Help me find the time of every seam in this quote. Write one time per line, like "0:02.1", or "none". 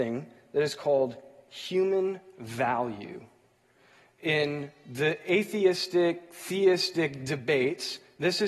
none